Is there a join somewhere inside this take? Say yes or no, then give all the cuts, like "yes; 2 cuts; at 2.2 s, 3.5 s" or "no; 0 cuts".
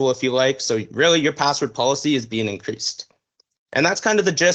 no; 0 cuts